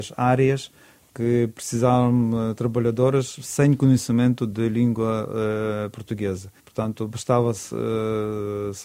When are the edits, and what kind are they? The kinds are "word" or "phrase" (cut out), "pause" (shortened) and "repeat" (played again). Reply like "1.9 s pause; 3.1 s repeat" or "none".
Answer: 6.6 s pause